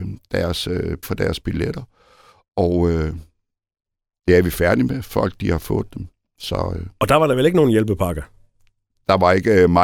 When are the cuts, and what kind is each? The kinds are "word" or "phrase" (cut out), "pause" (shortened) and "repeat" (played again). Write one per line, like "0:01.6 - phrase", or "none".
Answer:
0:01.0 - word